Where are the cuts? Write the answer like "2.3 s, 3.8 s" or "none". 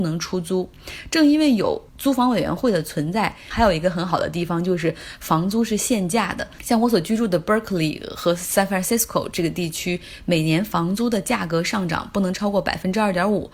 1.9 s